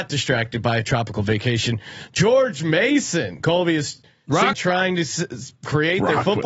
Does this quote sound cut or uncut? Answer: cut